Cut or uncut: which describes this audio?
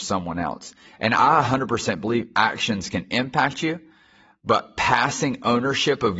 uncut